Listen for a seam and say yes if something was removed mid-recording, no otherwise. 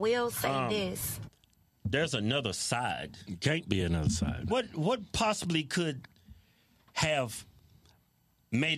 no